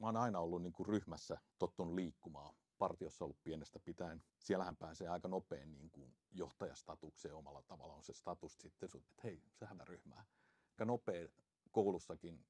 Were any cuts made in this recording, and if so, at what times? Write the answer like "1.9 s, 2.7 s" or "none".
1.5 s, 4.3 s, 6.2 s, 8.6 s, 9.1 s, 9.8 s, 10.8 s